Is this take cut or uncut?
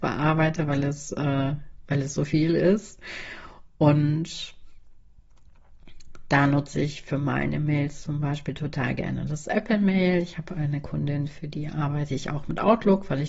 uncut